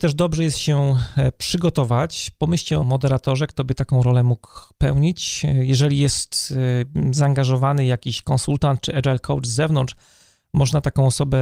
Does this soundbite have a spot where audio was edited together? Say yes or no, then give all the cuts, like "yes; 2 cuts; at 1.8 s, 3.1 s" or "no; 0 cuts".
yes; 1 cut; at 2.8 s